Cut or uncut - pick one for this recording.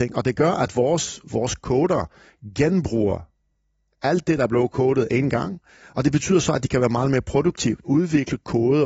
cut